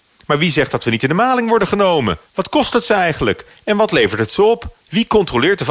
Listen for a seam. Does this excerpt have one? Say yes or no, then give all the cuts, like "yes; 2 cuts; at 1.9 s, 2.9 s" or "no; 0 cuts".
yes; 2 cuts; at 2.3 s, 4.8 s